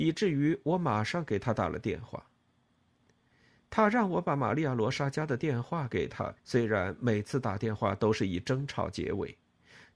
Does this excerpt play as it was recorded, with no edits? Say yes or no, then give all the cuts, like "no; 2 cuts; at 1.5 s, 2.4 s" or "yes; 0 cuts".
no; 1 cut; at 6.4 s